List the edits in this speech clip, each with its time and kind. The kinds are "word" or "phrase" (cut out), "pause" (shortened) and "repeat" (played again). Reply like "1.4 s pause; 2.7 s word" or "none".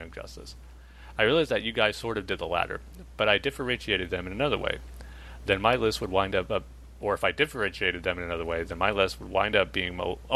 none